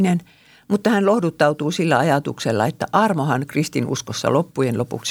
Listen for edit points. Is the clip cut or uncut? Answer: uncut